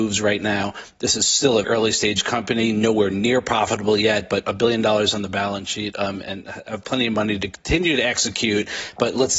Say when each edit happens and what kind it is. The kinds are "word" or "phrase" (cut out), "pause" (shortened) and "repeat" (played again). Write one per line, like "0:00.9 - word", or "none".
0:01.6 - word